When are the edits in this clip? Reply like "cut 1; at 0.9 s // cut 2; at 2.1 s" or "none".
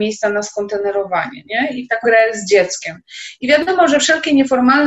cut 1; at 2.0 s